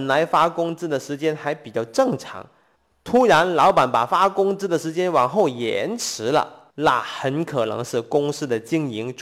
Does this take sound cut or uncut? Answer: cut